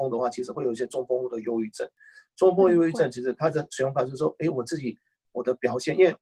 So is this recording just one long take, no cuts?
yes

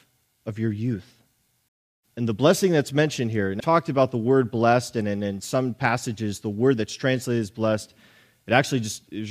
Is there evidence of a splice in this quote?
yes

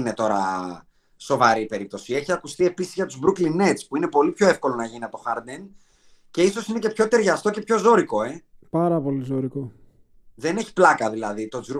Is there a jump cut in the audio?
no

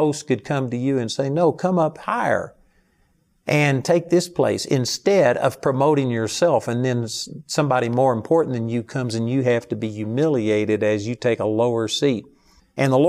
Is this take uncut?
yes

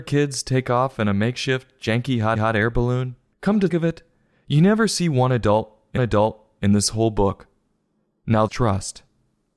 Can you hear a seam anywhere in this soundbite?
yes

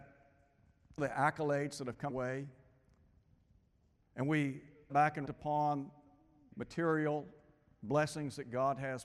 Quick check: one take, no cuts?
no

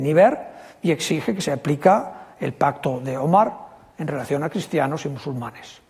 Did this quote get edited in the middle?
no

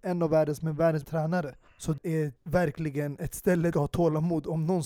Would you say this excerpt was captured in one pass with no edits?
no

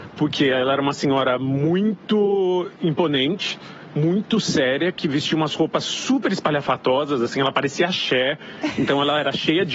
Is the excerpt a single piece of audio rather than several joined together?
yes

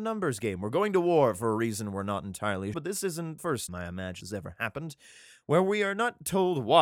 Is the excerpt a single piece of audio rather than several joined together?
no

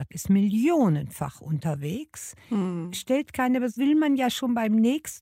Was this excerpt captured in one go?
no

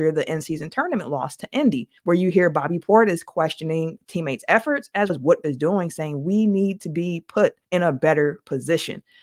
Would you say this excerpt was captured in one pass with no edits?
no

